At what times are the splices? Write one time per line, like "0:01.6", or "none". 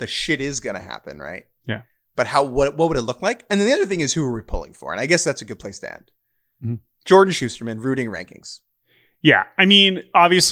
none